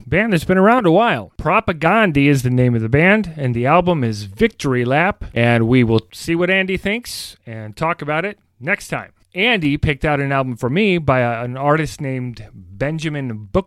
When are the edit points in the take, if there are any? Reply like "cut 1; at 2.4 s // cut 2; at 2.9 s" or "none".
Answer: none

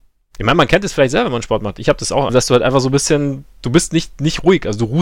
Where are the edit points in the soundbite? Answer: cut 1; at 2.3 s

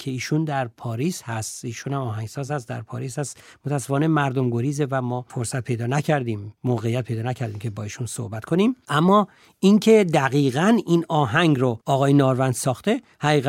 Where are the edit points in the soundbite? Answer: none

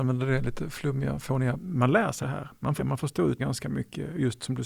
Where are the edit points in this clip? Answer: cut 1; at 1.6 s // cut 2; at 2.2 s // cut 3; at 2.8 s // cut 4; at 3.4 s

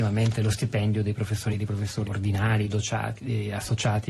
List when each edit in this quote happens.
cut 1; at 1.5 s // cut 2; at 2.1 s

